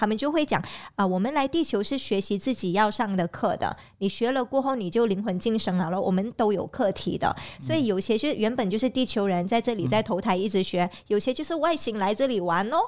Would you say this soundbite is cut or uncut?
uncut